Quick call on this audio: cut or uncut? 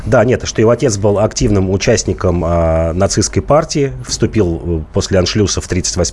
uncut